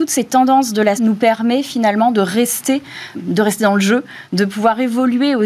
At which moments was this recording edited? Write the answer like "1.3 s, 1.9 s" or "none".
1.0 s, 3.1 s